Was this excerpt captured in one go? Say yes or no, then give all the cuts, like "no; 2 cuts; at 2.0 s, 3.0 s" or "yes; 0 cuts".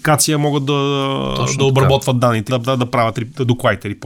no; 1 cut; at 2.5 s